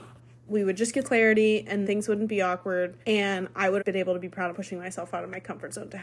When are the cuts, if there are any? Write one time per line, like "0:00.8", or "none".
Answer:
0:01.0
0:01.8
0:03.0
0:03.8
0:04.5